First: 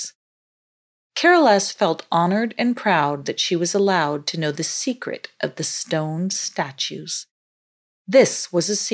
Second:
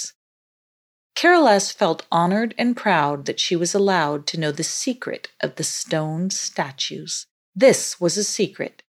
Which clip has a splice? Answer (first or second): second